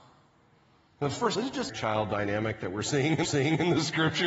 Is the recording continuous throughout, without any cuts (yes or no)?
no